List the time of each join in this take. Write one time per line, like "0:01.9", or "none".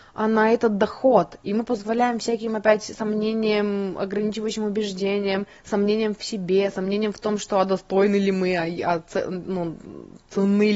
none